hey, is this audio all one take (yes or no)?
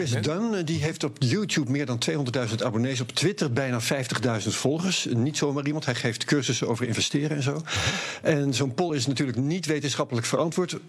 yes